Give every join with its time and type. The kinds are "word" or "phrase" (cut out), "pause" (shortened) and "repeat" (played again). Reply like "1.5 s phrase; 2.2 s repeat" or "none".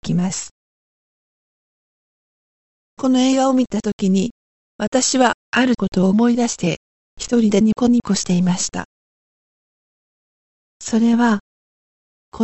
none